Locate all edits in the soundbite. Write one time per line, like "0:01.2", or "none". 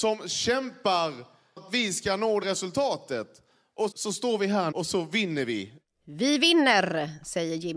0:01.6
0:02.4
0:03.9
0:04.7